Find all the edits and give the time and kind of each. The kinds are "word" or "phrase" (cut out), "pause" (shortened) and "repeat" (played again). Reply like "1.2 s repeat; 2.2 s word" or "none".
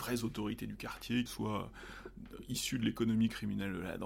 1.3 s phrase